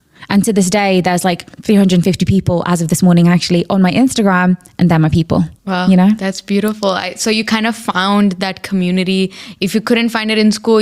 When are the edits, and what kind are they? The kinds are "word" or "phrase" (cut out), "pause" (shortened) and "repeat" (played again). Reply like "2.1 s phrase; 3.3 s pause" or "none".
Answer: 1.5 s pause; 5.6 s pause